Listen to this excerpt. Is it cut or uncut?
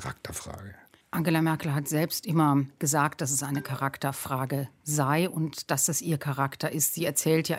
cut